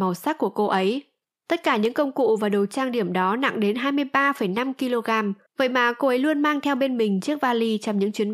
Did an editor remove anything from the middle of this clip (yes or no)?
yes